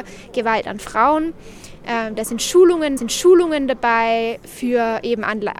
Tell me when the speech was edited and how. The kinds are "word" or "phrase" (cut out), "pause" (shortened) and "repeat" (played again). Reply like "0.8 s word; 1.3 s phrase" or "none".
3.0 s repeat